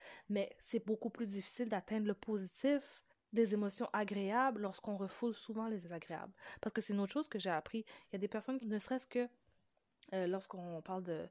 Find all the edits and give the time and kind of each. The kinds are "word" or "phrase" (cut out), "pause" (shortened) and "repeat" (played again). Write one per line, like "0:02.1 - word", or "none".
0:03.1 - pause
0:05.8 - word
0:08.6 - phrase